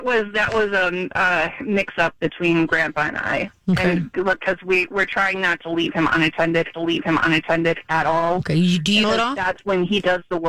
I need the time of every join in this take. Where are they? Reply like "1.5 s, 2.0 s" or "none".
6.7 s, 9.0 s